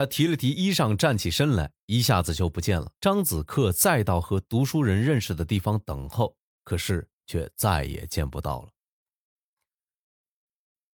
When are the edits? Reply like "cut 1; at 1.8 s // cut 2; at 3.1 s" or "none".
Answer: cut 1; at 3.0 s // cut 2; at 7.1 s